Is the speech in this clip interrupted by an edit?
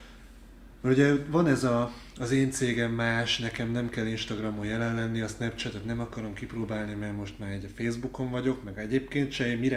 no; 0 cuts

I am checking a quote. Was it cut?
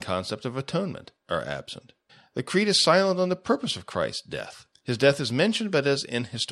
yes; 3 cuts; at 1.2 s, 2.1 s, 4.7 s

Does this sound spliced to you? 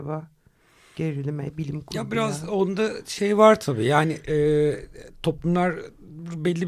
no; 0 cuts

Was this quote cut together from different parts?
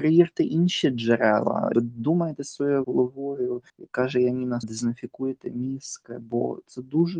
yes; 4 cuts; at 1.7 s, 2.8 s, 3.7 s, 4.6 s

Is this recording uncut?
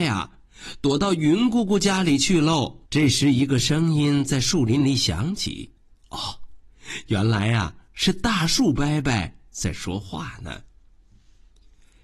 no; 2 cuts; at 2.9 s, 5.8 s

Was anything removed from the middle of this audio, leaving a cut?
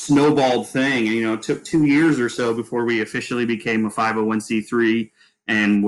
no; 0 cuts

